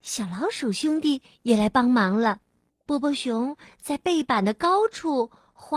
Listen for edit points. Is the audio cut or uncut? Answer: cut